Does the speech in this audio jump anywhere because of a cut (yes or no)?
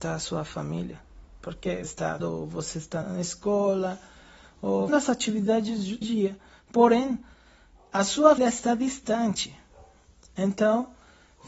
yes